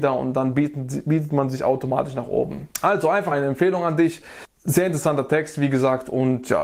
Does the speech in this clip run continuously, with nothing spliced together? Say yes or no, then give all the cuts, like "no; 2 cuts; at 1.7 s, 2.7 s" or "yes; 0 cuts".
no; 2 cuts; at 2.7 s, 3.3 s